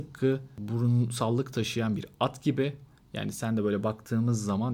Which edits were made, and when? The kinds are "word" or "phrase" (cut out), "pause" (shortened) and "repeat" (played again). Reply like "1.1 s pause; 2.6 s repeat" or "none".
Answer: none